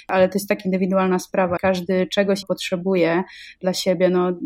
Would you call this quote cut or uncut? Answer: cut